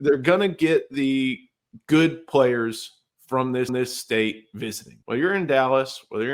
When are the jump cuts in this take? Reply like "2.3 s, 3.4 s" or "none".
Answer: 3.7 s, 5.0 s